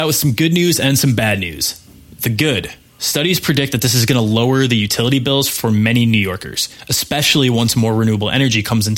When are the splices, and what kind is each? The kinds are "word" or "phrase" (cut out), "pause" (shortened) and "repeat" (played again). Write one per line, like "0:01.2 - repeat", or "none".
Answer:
0:02.9 - pause